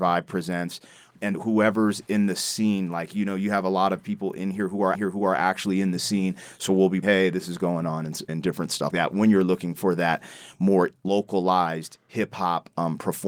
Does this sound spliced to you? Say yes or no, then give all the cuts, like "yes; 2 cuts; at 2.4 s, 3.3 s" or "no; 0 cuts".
yes; 6 cuts; at 1.3 s, 4.9 s, 7.0 s, 8.3 s, 8.9 s, 11.0 s